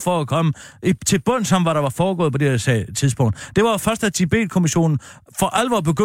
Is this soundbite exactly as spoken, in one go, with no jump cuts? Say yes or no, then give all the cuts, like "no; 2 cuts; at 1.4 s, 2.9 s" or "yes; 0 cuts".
yes; 0 cuts